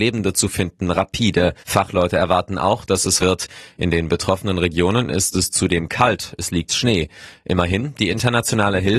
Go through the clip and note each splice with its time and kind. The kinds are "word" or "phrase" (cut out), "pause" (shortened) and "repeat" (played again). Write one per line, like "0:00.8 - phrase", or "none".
0:01.6 - pause
0:03.2 - phrase
0:06.7 - word